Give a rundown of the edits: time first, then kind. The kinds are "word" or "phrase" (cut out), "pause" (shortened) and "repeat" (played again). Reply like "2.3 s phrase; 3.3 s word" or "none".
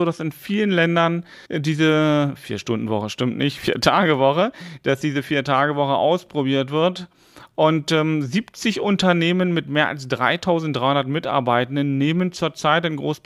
1.4 s pause

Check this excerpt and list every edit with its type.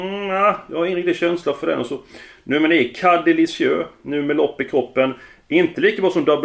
none

